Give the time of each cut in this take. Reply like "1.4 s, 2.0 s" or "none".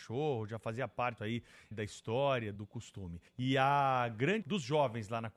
1.2 s, 1.7 s, 2.6 s, 3.3 s, 4.4 s